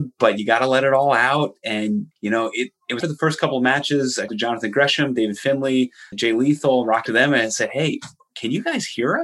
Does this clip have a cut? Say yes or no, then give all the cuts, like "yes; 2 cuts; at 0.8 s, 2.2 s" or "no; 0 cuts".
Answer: yes; 5 cuts; at 2.1 s, 3.0 s, 4.3 s, 6.1 s, 7.1 s